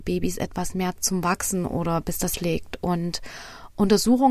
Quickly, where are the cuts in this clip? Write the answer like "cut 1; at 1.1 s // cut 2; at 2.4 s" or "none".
cut 1; at 1.0 s // cut 2; at 2.3 s

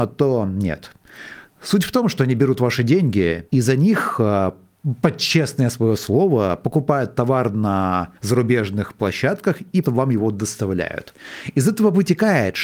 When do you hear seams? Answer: cut 1; at 3.5 s // cut 2; at 8.2 s // cut 3; at 9.8 s

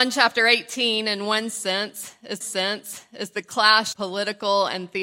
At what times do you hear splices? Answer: cut 1; at 2.4 s // cut 2; at 3.9 s

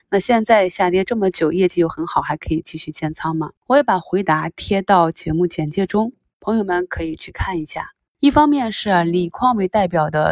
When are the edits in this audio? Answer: cut 1; at 3.6 s

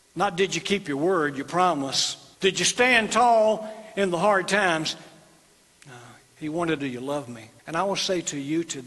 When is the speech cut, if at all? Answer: cut 1; at 2.3 s // cut 2; at 6.8 s // cut 3; at 7.6 s

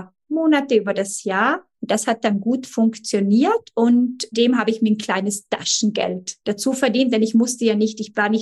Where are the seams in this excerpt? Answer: cut 1; at 1.7 s // cut 2; at 4.3 s // cut 3; at 6.4 s

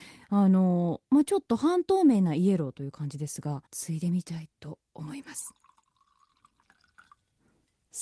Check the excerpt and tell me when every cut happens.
cut 1; at 3.7 s // cut 2; at 4.5 s

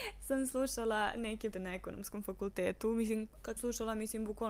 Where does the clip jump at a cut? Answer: cut 1; at 1.5 s // cut 2; at 3.6 s

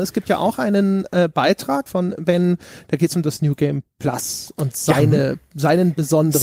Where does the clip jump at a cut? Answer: cut 1; at 1.9 s

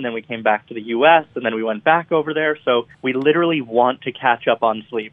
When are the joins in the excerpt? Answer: cut 1; at 2.9 s

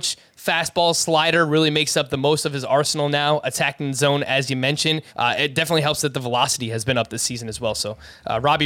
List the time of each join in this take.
cut 1; at 5.1 s

